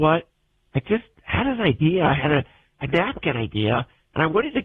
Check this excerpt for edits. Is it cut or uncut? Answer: uncut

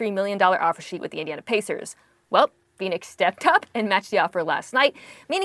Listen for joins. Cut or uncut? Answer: uncut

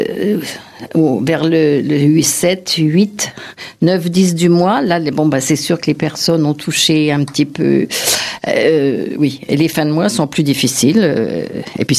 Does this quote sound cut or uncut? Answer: uncut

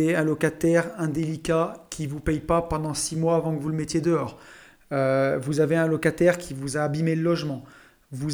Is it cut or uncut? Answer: uncut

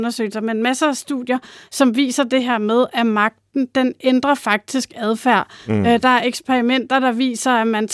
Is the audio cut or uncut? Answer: uncut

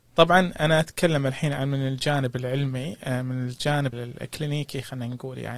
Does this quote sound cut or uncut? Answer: cut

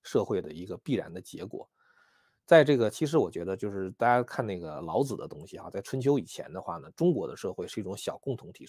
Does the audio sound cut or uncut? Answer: uncut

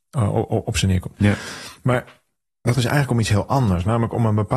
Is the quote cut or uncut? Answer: cut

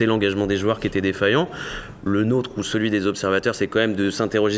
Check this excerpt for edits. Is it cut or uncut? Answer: uncut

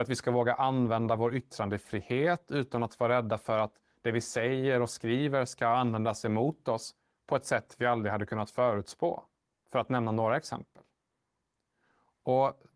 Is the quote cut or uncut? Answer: uncut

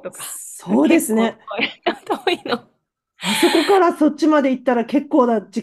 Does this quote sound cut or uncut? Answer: uncut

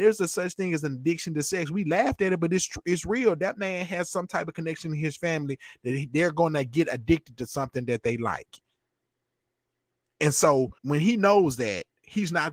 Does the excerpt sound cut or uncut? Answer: cut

